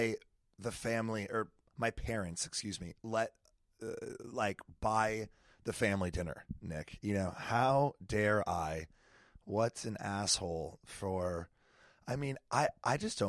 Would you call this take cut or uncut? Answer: uncut